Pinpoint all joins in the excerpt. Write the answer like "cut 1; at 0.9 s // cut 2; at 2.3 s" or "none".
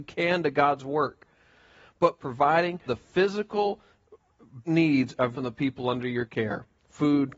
cut 1; at 2.2 s // cut 2; at 2.9 s // cut 3; at 4.6 s // cut 4; at 5.3 s